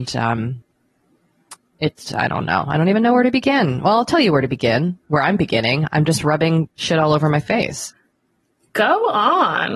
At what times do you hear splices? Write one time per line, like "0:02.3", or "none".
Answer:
0:02.1